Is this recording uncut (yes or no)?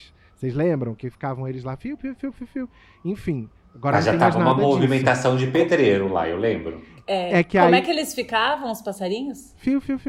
yes